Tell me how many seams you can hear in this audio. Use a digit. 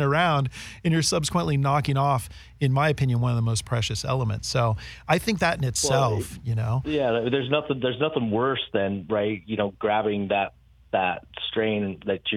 0